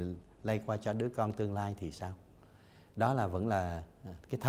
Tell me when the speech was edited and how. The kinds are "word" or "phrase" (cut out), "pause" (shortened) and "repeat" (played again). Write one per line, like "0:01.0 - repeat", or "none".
none